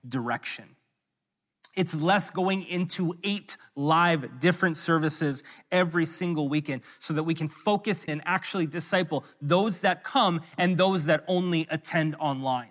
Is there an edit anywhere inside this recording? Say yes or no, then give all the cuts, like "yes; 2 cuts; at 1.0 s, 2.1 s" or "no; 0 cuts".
yes; 1 cut; at 8.1 s